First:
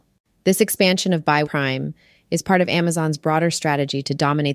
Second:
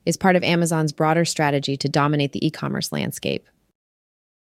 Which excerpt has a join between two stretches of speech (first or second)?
first